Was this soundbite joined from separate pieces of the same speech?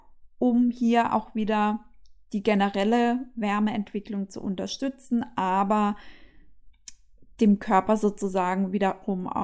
no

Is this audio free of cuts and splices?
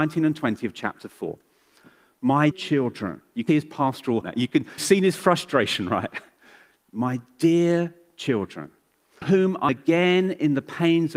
no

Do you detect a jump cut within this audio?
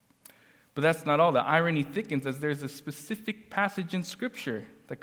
no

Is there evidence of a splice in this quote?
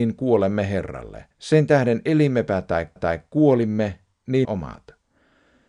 yes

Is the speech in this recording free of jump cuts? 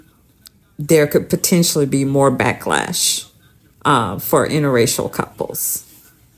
yes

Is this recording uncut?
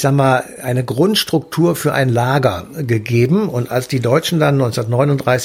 yes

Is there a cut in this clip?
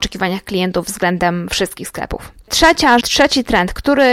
yes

